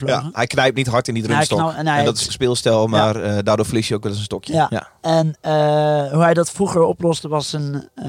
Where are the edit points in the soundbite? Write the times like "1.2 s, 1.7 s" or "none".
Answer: 2.3 s